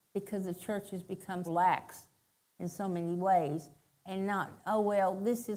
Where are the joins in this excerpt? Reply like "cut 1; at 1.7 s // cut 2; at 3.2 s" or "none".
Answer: cut 1; at 1.5 s